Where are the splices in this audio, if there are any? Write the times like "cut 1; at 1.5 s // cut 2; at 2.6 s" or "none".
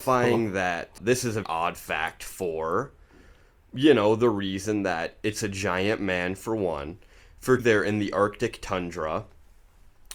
cut 1; at 1.0 s // cut 2; at 1.4 s // cut 3; at 7.6 s